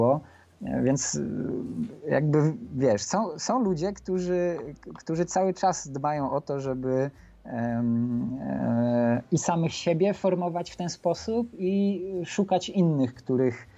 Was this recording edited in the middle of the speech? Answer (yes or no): no